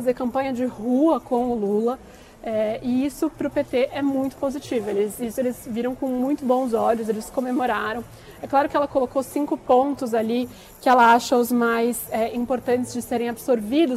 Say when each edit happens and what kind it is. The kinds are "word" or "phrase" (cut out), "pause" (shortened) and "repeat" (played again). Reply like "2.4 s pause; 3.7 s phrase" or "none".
none